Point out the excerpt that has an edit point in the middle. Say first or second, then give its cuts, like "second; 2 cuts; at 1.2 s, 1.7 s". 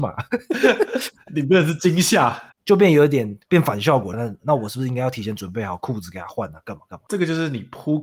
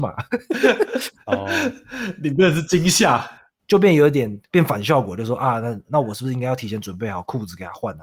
first; 3 cuts; at 1.3 s, 2.5 s, 4.1 s